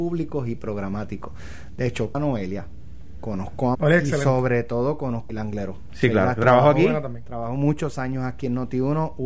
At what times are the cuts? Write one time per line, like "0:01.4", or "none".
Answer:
0:02.1
0:03.7
0:05.3